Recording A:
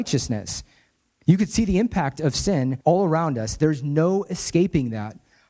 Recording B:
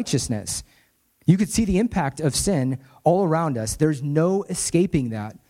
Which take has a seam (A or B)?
A